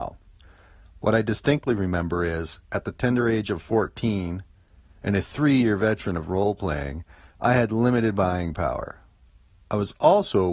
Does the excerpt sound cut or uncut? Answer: uncut